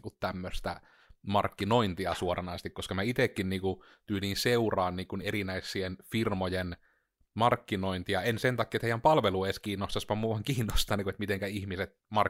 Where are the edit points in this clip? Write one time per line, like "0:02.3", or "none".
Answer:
none